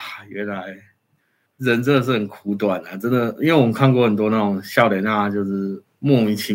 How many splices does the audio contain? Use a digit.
0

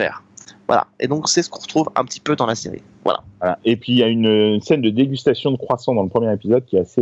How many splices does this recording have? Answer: 0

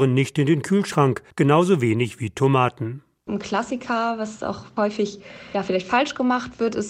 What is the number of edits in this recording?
1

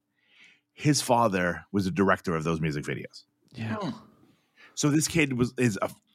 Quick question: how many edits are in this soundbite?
0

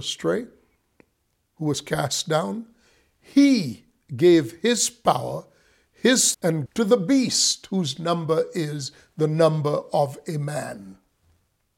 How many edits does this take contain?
2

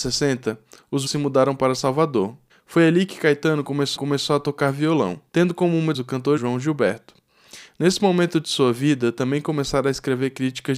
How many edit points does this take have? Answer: 6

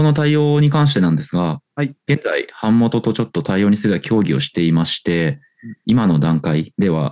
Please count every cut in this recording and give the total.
1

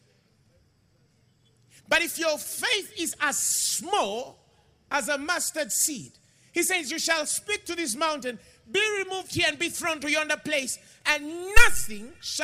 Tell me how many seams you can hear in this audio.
0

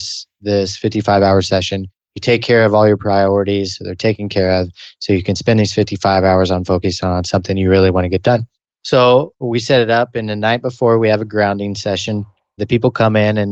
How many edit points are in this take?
0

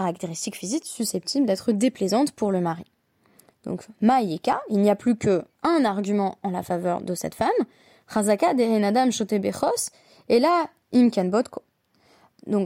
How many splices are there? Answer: 1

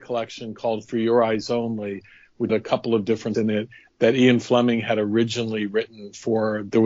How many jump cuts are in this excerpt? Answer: 2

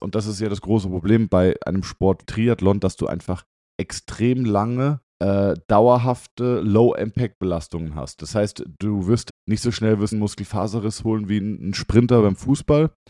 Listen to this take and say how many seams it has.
5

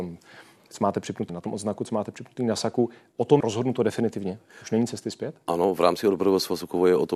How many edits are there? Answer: 2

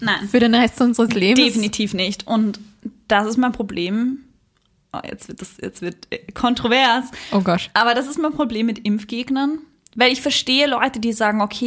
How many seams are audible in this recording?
0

